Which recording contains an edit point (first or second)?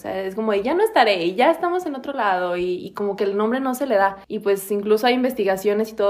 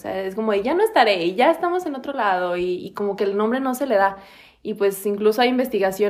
first